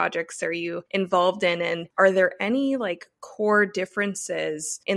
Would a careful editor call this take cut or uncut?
uncut